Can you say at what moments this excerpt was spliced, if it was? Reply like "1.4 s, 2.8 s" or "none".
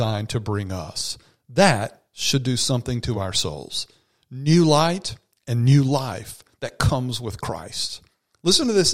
none